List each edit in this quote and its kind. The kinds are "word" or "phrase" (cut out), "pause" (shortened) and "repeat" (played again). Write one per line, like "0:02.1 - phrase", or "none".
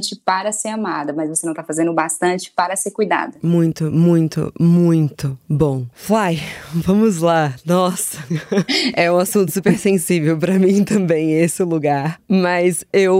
0:05.9 - pause